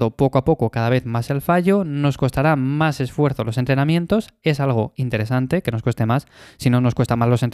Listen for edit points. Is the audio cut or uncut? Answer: uncut